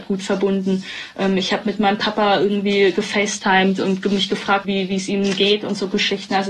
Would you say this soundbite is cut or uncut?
cut